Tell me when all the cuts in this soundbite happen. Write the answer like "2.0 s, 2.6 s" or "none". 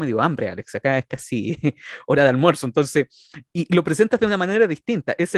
3.5 s